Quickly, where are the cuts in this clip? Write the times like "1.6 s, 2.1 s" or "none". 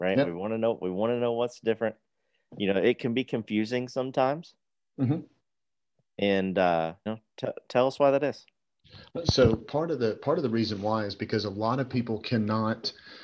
7.1 s, 9.6 s

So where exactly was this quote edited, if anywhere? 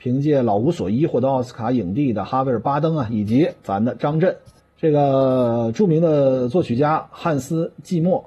3.6 s, 4.6 s

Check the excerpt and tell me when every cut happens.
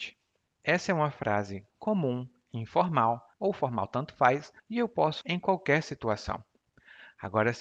1.7 s, 3.3 s, 4.6 s, 5.2 s

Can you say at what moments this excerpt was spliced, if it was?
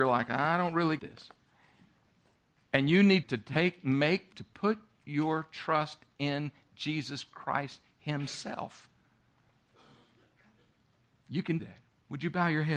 1.0 s, 3.2 s, 4.3 s, 11.6 s

